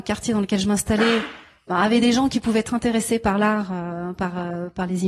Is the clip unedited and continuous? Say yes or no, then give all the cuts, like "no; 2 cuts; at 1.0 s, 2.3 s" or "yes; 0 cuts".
yes; 0 cuts